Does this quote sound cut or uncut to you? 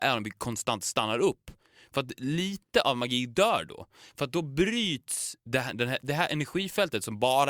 uncut